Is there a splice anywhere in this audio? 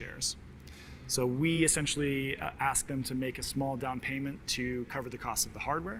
no; 0 cuts

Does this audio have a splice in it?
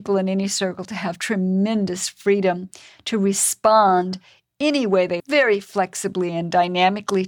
yes; 1 cut; at 5.2 s

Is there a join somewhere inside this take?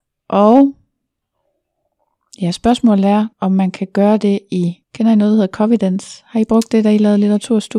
yes; 2 cuts; at 3.3 s, 4.8 s

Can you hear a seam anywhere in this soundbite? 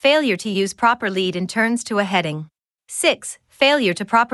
yes; 1 cut; at 2.7 s

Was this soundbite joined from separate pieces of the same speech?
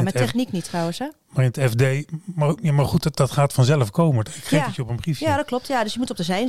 no; 0 cuts

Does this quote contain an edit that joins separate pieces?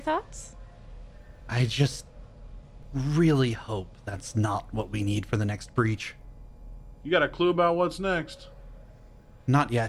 no; 0 cuts

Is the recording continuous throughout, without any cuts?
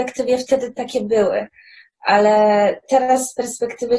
yes; 0 cuts

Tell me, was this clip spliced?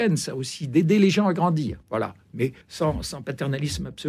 yes; 2 cuts; at 1.8 s, 2.6 s

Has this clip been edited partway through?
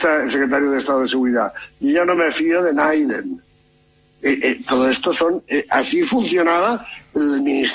no; 0 cuts

